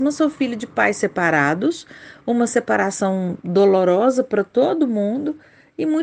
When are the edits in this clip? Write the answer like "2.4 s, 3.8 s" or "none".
none